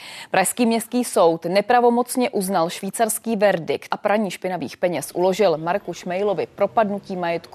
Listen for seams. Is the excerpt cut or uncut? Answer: cut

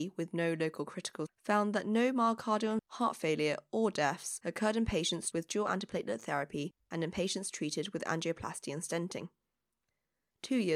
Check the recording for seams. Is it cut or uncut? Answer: cut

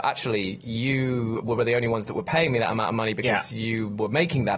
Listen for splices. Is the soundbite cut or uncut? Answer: uncut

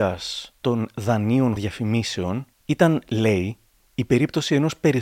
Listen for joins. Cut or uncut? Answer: cut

